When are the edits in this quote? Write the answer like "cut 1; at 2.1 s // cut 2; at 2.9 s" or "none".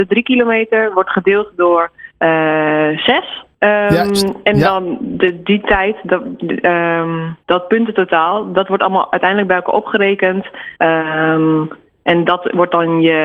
cut 1; at 2.1 s // cut 2; at 3.5 s // cut 3; at 7.4 s // cut 4; at 10.8 s